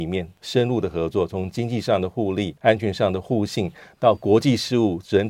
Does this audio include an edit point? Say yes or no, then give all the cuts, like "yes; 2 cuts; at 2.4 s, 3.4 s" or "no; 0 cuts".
yes; 1 cut; at 2.6 s